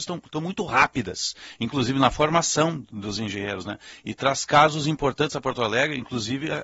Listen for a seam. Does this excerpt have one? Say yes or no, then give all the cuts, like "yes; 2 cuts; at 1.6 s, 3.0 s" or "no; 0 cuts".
no; 0 cuts